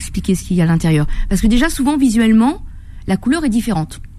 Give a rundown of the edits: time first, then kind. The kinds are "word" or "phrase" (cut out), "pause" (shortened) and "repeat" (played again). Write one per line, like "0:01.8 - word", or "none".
none

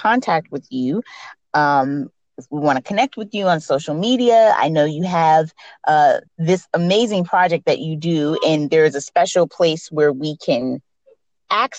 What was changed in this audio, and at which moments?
0:06.3 - pause

